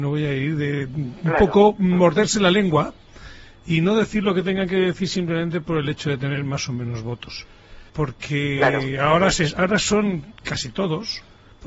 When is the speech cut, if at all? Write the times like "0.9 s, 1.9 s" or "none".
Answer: 7.9 s